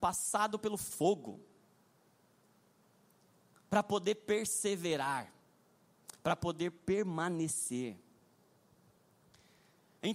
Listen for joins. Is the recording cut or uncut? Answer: uncut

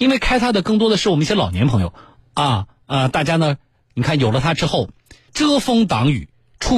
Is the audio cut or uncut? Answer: cut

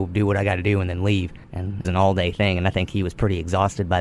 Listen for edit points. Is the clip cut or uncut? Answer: cut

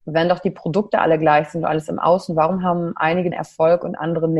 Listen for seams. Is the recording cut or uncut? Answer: cut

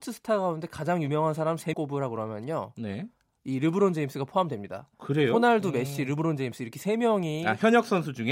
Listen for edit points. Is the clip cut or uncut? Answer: cut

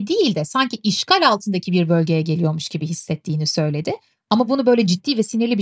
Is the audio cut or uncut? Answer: uncut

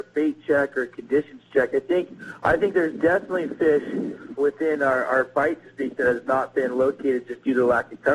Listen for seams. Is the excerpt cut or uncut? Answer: cut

